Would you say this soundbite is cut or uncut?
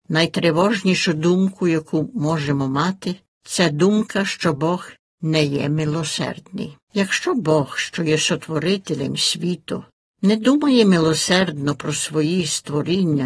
cut